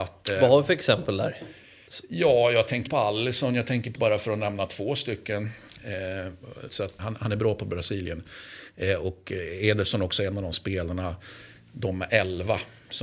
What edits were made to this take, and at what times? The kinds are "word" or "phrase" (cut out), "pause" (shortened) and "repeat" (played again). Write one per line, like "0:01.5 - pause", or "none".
0:02.9 - word
0:04.0 - word
0:06.7 - word
0:07.0 - word